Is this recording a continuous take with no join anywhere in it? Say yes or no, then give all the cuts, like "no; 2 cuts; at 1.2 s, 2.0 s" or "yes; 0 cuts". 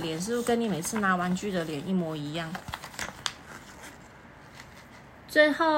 yes; 0 cuts